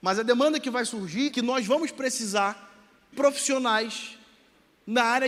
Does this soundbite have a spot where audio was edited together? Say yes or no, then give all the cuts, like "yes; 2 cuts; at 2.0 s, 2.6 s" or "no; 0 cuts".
yes; 2 cuts; at 1.3 s, 3.1 s